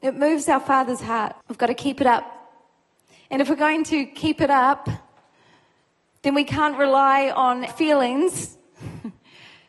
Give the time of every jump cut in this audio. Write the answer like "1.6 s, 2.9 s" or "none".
1.4 s, 7.7 s